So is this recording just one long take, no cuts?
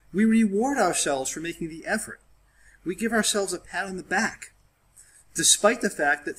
yes; 0 cuts

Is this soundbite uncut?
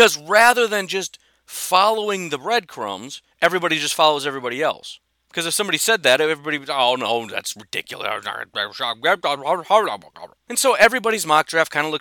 no; 2 cuts; at 3.3 s, 10.4 s

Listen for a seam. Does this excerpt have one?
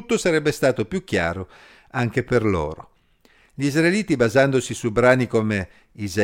no; 0 cuts

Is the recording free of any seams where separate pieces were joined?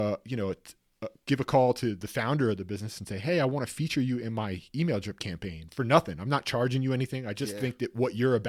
yes; 0 cuts

